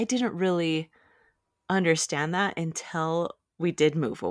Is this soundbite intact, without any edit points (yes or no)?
yes